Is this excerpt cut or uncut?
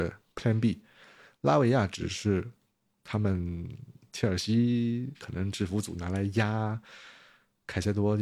uncut